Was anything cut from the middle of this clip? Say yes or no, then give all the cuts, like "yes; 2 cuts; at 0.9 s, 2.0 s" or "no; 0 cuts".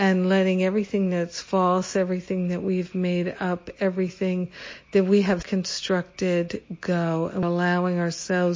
yes; 2 cuts; at 5.4 s, 7.4 s